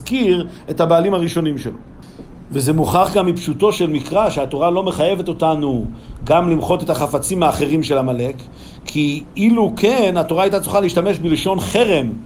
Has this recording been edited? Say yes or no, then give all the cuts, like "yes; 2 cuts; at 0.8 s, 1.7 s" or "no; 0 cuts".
no; 0 cuts